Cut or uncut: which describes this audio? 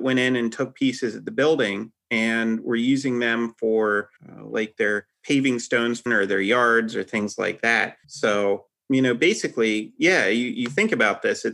cut